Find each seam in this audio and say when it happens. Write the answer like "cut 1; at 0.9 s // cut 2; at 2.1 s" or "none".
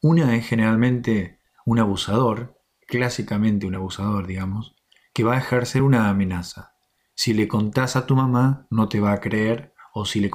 none